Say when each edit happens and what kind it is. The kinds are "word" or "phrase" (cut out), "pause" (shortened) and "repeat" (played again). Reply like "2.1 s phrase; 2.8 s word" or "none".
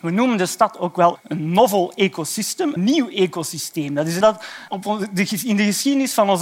1.2 s word; 2.8 s word; 4.2 s word; 4.7 s word